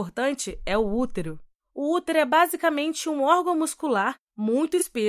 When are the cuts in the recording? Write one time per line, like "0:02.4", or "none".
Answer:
none